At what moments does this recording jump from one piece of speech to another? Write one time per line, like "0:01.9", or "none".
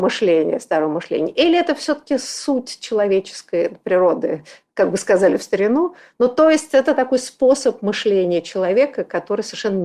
none